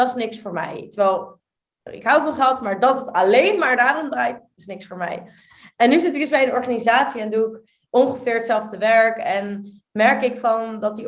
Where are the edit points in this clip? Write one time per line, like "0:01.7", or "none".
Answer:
none